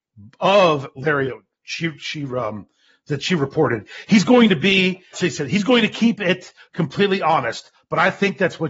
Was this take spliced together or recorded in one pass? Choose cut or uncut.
cut